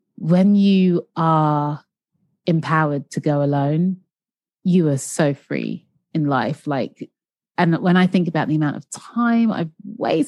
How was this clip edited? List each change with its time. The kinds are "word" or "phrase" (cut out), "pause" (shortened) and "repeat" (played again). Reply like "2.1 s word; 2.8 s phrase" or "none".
none